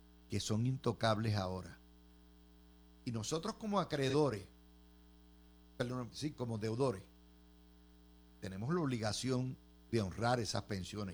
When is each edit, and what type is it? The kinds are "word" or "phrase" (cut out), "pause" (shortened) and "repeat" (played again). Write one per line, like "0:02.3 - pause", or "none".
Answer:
none